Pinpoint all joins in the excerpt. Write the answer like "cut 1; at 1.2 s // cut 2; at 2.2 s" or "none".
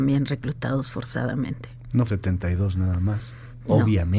cut 1; at 2.1 s